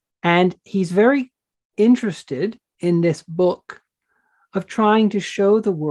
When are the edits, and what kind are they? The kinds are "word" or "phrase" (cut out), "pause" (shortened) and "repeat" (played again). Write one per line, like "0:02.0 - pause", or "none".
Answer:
none